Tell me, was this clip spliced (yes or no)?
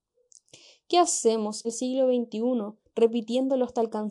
yes